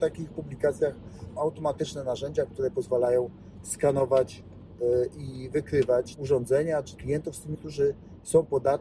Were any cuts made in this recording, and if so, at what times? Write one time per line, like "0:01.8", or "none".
0:01.4
0:06.1
0:07.0
0:07.5